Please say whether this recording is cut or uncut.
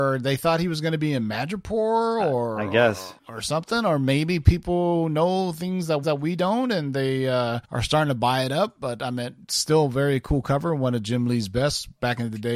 cut